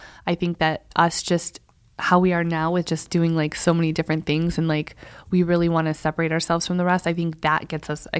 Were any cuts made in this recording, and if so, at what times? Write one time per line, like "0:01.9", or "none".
none